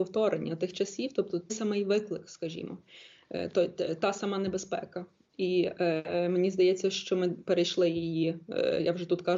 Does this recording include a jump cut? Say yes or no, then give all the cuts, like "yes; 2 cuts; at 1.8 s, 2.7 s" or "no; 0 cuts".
yes; 1 cut; at 1.5 s